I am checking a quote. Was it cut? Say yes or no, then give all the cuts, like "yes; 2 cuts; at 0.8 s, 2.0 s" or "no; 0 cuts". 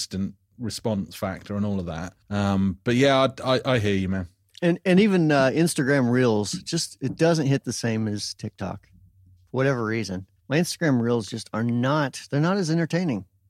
yes; 3 cuts; at 2.2 s, 4.4 s, 10.4 s